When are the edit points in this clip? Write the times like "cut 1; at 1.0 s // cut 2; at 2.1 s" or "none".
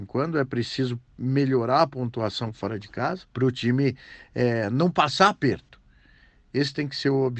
cut 1; at 3.3 s